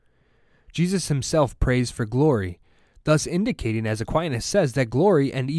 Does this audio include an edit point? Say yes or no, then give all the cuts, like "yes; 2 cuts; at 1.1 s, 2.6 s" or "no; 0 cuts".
no; 0 cuts